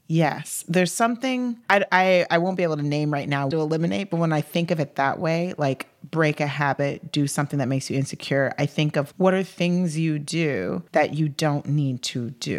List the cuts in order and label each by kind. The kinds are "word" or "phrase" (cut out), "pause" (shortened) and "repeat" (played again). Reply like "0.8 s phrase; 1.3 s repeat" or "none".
3.5 s phrase; 9.1 s word; 10.9 s pause